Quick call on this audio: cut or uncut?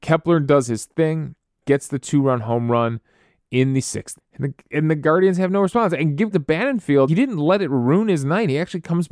cut